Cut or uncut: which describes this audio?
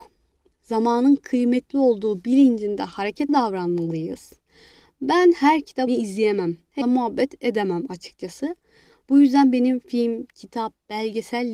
cut